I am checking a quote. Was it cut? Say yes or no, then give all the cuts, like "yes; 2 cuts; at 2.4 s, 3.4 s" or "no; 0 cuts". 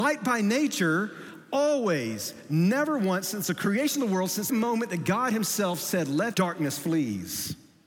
yes; 2 cuts; at 4.5 s, 6.3 s